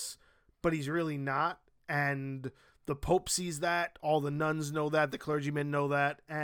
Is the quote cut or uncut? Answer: uncut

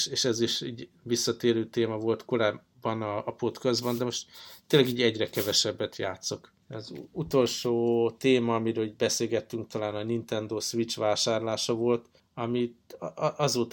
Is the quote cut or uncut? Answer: cut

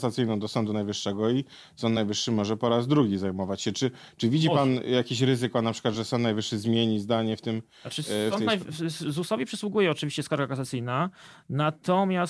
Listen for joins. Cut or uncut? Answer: uncut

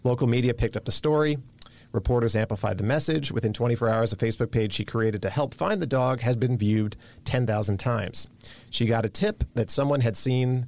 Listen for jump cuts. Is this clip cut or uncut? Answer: uncut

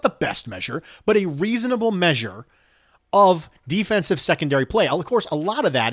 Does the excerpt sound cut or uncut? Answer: uncut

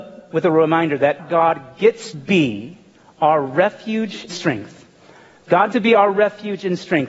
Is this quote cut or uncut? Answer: cut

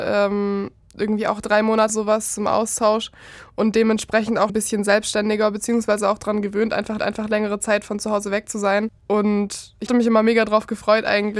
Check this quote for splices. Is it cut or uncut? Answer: cut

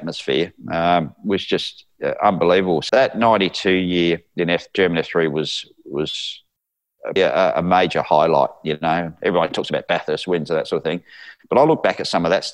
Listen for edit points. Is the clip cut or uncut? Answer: cut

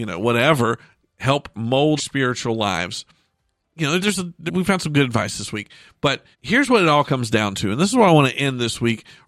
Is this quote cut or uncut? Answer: cut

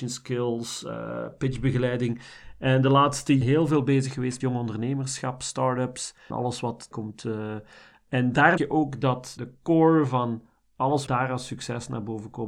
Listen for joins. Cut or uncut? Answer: cut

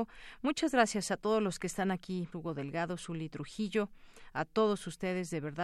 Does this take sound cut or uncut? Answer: cut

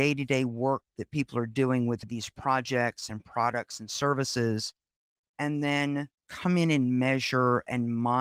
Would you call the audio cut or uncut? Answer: cut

